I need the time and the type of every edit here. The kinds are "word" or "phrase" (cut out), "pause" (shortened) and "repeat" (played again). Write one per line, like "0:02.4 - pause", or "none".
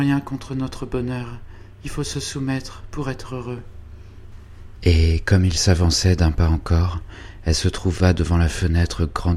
none